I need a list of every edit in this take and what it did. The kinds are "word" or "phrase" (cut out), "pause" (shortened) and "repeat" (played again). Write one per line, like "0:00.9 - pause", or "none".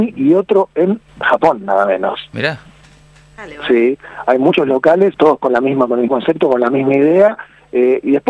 0:01.1 - pause
0:02.8 - pause
0:05.1 - word
0:06.1 - word